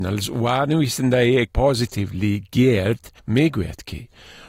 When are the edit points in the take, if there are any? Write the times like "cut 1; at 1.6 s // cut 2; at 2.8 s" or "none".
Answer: cut 1; at 1.5 s // cut 2; at 3.2 s